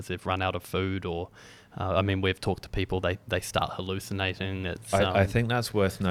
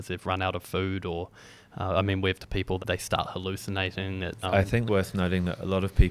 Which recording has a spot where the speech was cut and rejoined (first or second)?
second